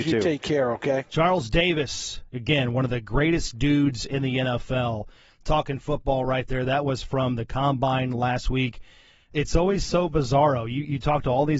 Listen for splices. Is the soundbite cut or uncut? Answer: uncut